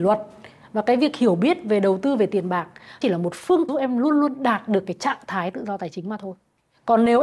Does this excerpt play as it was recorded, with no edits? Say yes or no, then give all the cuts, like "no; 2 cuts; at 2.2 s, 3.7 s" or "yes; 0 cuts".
no; 2 cuts; at 3.0 s, 3.7 s